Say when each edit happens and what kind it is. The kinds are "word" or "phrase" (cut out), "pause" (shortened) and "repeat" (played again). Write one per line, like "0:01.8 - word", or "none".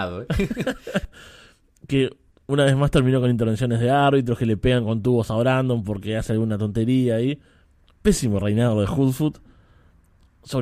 none